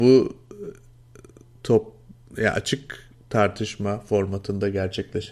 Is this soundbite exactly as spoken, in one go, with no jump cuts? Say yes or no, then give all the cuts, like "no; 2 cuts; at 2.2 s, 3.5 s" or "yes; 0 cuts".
yes; 0 cuts